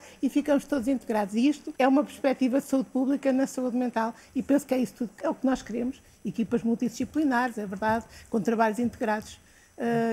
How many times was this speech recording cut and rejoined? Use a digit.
2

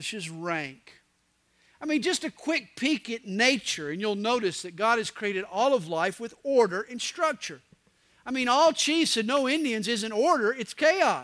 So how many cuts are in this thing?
0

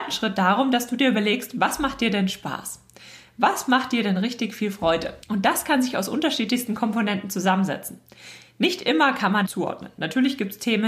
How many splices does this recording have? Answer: 2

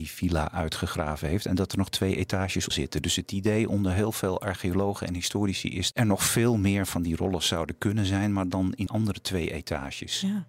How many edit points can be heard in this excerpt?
3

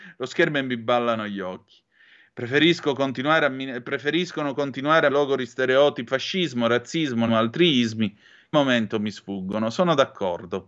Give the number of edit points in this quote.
4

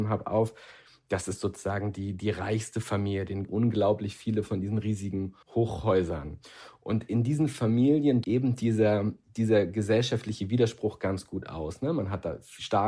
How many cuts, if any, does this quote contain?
3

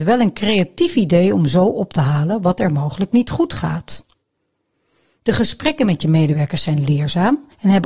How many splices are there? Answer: 0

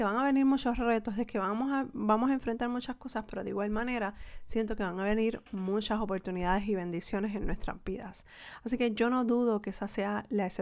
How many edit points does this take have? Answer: 0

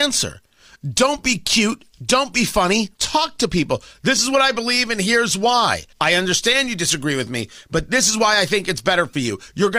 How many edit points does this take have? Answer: 2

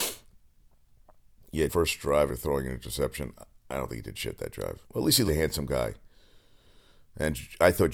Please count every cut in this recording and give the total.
4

